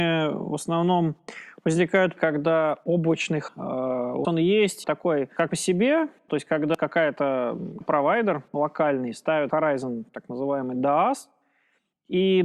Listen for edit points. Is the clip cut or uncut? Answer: cut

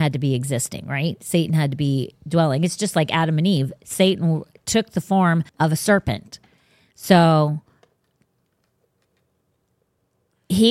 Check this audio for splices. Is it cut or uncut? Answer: cut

